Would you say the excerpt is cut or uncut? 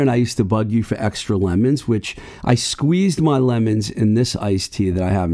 uncut